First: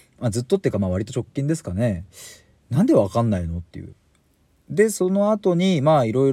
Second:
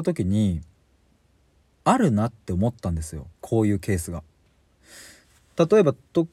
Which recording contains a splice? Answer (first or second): second